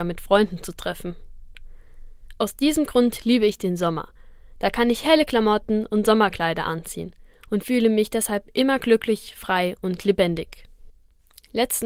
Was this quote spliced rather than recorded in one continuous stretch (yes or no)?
no